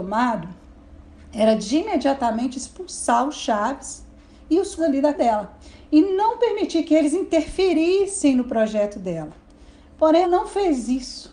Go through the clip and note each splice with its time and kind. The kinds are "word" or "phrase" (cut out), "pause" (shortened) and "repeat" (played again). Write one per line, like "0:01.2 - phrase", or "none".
0:04.8 - word
0:05.1 - word
0:10.2 - word